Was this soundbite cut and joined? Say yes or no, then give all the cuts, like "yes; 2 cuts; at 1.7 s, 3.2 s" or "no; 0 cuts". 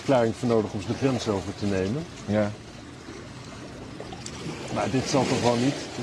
no; 0 cuts